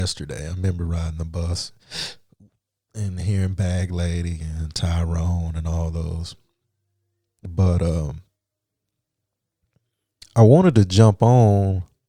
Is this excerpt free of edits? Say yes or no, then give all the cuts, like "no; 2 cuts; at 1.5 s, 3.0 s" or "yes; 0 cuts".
yes; 0 cuts